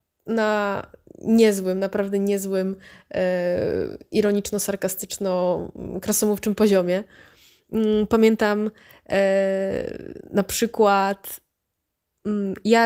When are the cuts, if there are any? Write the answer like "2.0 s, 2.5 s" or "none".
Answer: none